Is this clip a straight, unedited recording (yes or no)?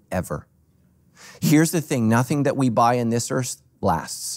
yes